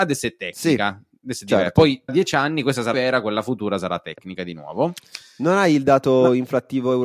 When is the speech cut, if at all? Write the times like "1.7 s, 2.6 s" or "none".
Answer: 2.1 s, 2.9 s